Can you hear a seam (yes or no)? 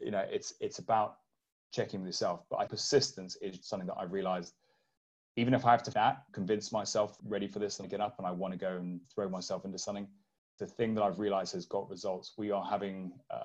yes